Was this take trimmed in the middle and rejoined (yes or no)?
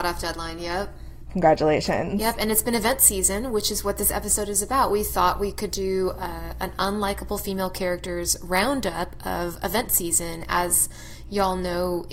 no